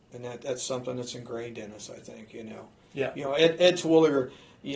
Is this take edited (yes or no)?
no